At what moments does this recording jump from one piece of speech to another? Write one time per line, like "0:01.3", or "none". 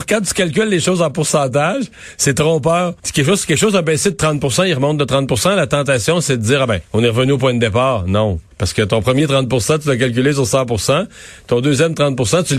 0:03.0
0:06.9
0:08.5

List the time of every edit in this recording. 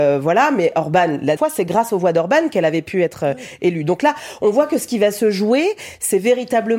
0:01.4

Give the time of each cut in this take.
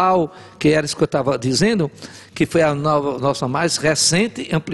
none

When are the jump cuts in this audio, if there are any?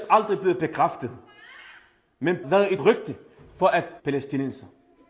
0:02.4
0:02.8
0:04.0

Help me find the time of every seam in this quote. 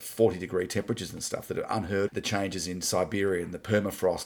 0:02.1

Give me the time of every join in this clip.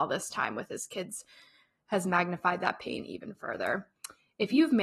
none

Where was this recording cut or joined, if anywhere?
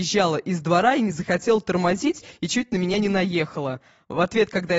none

